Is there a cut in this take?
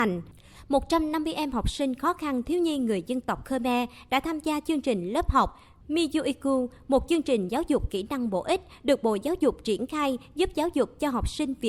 no; 0 cuts

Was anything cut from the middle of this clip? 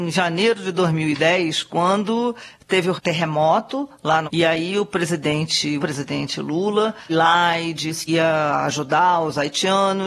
yes; 5 cuts; at 3.0 s, 4.2 s, 5.8 s, 7.1 s, 8.1 s

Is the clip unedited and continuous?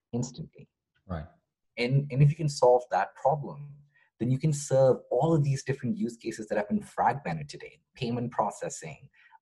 yes; 0 cuts

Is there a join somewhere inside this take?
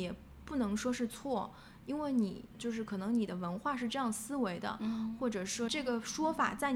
yes; 2 cuts; at 2.6 s, 5.7 s

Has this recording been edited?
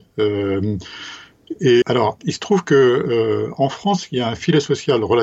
yes; 1 cut; at 1.8 s

